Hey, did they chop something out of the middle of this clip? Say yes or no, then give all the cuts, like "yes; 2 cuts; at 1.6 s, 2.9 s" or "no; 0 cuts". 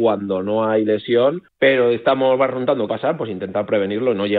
yes; 2 cuts; at 1.5 s, 2.9 s